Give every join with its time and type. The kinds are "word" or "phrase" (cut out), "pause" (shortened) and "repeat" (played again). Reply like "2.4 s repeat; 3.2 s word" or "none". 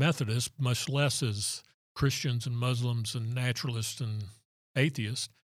none